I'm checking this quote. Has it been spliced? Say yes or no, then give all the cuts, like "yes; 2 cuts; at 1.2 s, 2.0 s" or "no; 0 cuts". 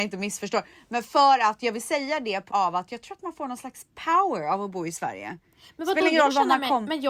yes; 1 cut; at 2.5 s